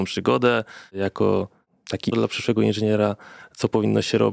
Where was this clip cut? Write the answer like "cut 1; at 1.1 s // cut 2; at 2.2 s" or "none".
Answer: cut 1; at 2.1 s